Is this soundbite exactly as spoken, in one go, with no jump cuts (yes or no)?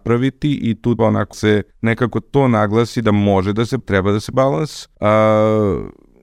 no